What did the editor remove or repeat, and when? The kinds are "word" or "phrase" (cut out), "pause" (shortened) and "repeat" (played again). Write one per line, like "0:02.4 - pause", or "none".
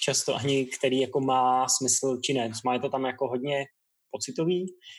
none